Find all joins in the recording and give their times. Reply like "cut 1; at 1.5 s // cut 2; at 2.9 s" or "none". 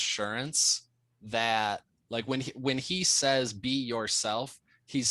none